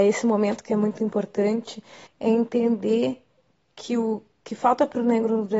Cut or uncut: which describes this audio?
cut